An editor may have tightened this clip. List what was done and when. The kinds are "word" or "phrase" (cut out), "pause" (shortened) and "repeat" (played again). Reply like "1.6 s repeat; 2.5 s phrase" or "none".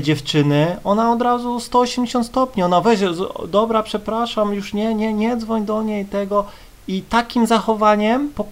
none